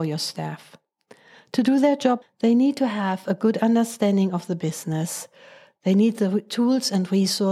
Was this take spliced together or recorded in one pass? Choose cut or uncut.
cut